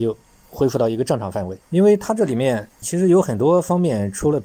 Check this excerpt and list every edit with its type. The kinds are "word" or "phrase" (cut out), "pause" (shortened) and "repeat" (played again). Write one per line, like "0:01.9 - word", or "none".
0:01.6 - pause
0:02.7 - pause

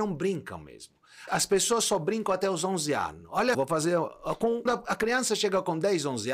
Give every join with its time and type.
0:01.3 - word
0:03.5 - word
0:04.7 - word

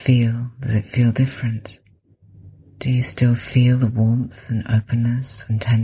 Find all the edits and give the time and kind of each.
0:02.6 - pause

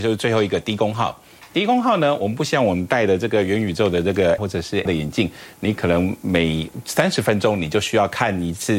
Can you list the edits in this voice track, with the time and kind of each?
0:04.4 - word
0:04.9 - word

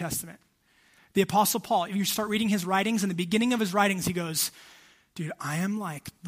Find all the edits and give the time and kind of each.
none

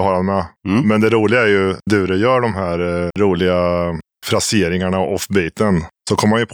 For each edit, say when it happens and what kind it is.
0:01.9 - word
0:03.1 - word

